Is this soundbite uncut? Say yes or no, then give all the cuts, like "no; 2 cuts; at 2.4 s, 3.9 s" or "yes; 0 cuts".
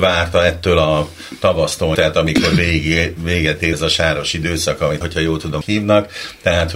no; 4 cuts; at 1.9 s, 3.7 s, 5.0 s, 5.6 s